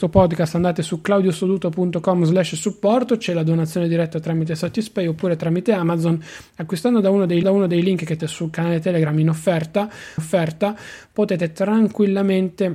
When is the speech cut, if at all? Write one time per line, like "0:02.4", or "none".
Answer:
0:07.4
0:08.2
0:10.2